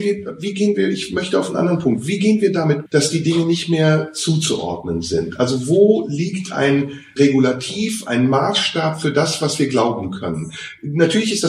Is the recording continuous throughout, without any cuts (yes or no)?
no